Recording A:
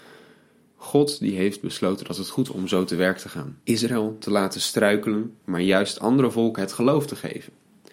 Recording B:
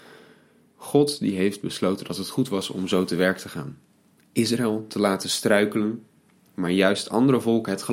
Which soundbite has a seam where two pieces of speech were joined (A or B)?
A